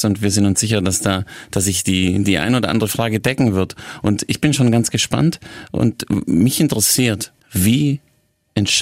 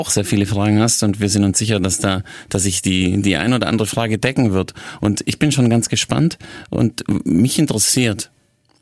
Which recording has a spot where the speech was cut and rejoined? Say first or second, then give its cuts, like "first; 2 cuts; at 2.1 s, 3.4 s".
first; 1 cut; at 7.4 s